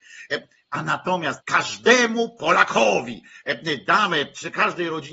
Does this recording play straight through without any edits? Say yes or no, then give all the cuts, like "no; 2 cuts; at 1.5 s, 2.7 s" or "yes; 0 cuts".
no; 1 cut; at 1.4 s